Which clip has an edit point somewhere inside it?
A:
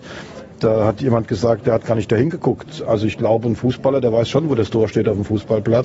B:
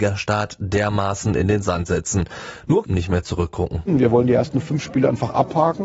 B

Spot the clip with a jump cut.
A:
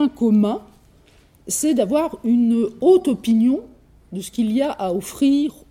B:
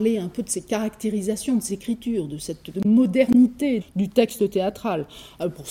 B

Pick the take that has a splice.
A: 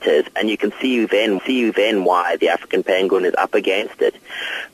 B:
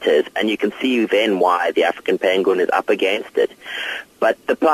A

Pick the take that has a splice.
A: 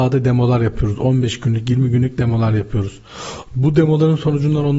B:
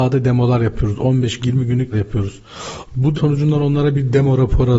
B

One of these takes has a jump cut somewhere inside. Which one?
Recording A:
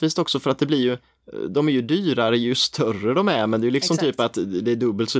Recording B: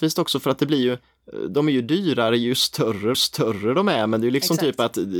B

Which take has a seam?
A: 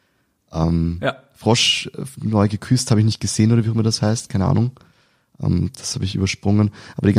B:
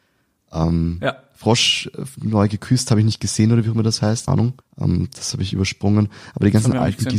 B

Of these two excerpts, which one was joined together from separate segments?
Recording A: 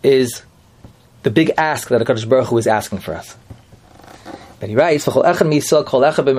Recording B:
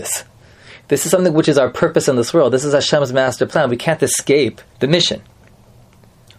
B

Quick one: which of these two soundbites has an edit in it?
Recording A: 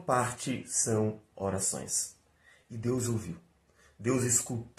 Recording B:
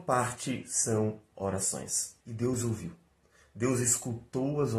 B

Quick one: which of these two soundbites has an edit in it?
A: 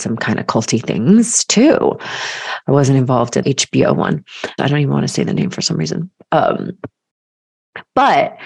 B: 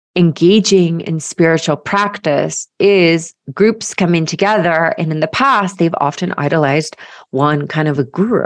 A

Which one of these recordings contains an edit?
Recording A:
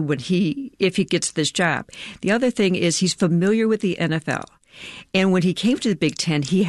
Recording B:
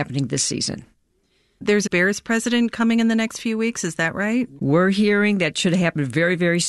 B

